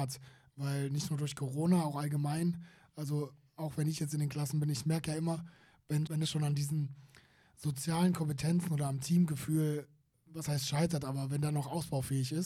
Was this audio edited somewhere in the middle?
yes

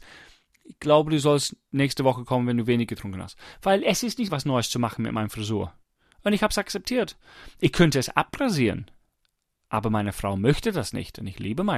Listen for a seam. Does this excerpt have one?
yes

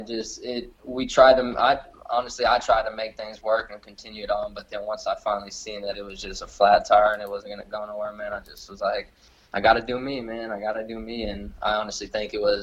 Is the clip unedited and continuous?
yes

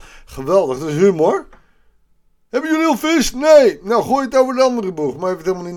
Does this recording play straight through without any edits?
yes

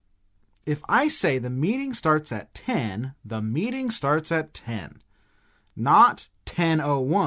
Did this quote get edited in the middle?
no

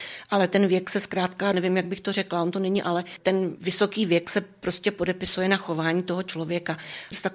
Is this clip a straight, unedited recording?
no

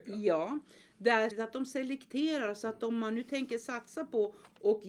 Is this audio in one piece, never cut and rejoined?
no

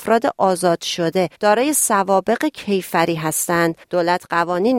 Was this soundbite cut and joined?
yes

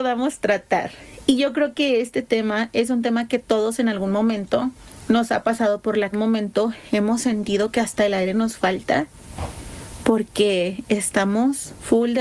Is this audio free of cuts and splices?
no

